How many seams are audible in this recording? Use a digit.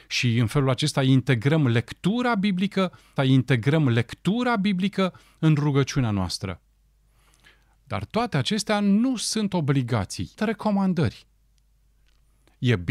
2